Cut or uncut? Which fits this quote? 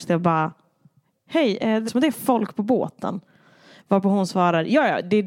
cut